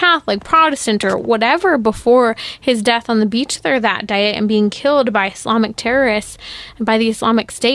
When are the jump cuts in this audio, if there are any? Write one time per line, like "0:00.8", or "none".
none